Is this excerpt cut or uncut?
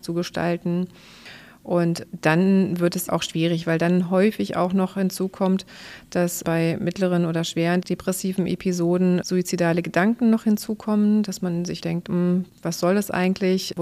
cut